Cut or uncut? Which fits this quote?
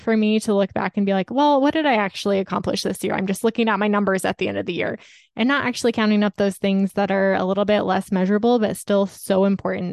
uncut